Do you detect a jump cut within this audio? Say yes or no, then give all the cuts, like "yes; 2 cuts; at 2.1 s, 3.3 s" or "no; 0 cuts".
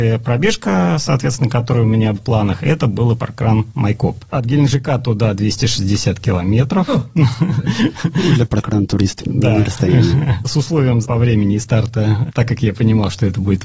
yes; 4 cuts; at 2.2 s, 3.2 s, 9.2 s, 11.0 s